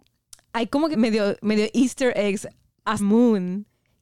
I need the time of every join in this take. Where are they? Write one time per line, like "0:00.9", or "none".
0:00.9
0:03.0